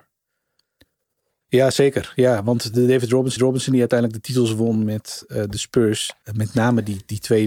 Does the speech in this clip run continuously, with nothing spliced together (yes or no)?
no